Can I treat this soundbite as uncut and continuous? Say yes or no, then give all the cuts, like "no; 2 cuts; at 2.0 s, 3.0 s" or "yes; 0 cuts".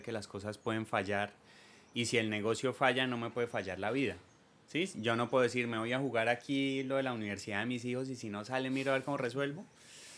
yes; 0 cuts